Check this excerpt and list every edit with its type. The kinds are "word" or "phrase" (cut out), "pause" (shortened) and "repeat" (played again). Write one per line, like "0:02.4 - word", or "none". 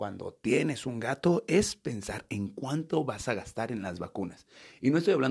none